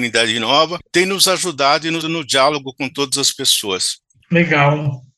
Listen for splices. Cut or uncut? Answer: cut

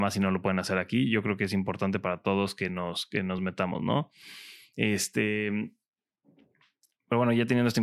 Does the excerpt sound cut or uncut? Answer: uncut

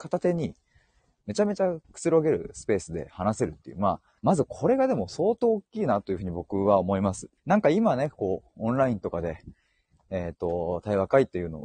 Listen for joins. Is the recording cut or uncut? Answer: cut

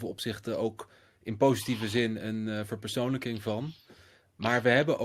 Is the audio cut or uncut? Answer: uncut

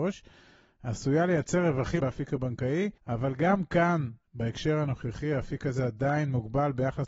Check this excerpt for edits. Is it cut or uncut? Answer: cut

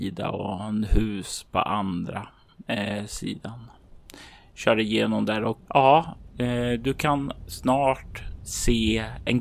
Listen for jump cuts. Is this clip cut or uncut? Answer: uncut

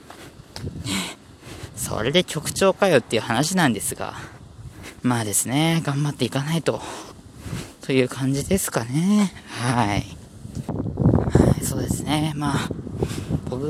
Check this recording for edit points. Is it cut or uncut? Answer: cut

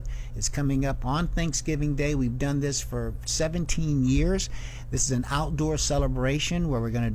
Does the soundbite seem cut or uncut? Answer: uncut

